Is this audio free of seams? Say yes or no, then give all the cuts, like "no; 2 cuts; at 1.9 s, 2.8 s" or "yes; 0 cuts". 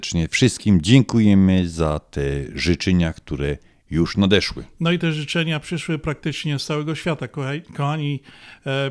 yes; 0 cuts